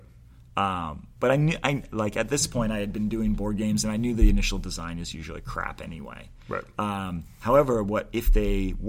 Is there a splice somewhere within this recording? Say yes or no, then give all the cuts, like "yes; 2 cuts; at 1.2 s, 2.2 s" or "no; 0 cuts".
no; 0 cuts